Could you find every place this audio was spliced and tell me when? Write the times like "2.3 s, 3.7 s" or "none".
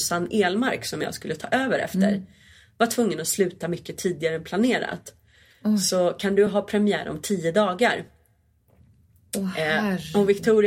none